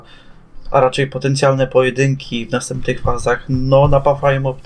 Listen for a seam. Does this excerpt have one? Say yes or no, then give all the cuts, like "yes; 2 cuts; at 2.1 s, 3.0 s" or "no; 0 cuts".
no; 0 cuts